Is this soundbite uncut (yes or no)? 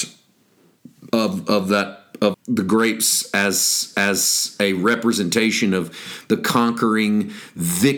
no